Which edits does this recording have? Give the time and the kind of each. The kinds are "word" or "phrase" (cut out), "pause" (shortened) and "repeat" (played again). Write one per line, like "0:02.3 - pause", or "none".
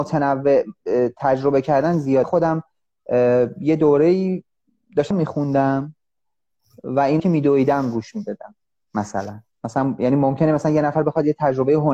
0:02.2 - word
0:05.1 - word
0:07.2 - word